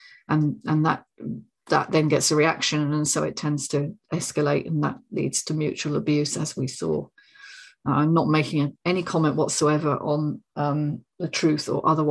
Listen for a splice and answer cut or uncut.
uncut